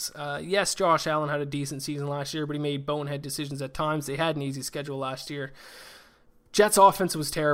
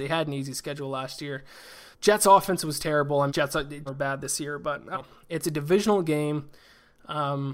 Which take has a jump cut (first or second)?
second